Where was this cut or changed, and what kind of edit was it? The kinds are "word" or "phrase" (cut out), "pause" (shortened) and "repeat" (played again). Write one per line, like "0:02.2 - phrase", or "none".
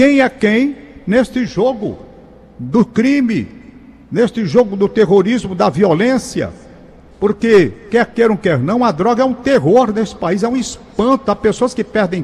0:04.0 - pause

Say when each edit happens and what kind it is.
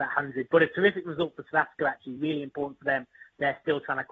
none

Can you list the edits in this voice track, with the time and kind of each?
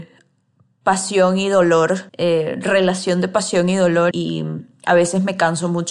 0:02.1 - pause
0:04.1 - word

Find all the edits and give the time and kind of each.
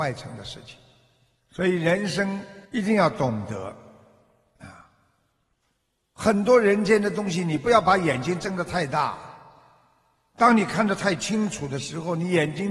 0:02.7 - pause

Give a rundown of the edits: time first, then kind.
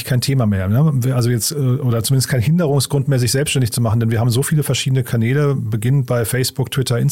none

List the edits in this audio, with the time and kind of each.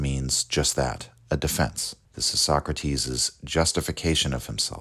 0:02.0 - pause

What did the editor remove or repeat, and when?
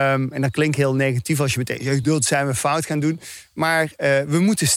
none

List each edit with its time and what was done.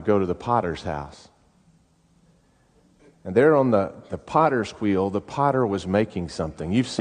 none

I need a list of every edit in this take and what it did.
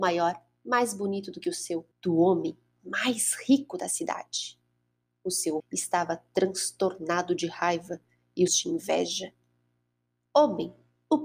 0:01.9 - pause
0:05.6 - word
0:08.5 - phrase

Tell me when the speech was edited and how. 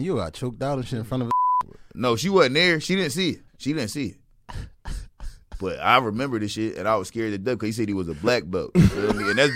0:03.5 - pause

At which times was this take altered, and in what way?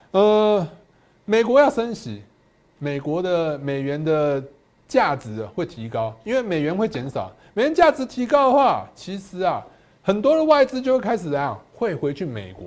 none

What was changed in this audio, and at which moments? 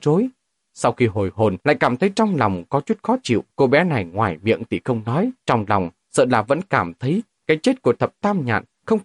0:01.6 - pause
0:03.5 - pause
0:05.4 - pause

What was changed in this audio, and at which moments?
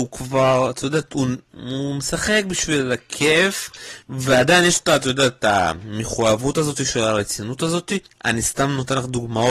0:04.0 - pause

